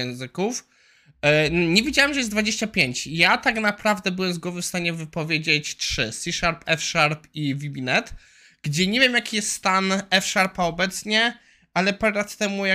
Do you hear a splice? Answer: no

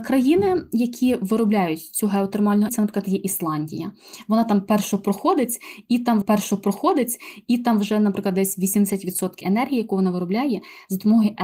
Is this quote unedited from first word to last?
no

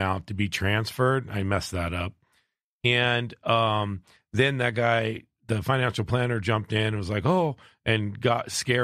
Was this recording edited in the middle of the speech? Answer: no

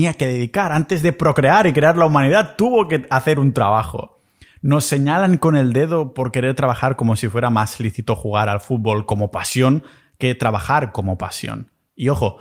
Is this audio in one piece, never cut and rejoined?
yes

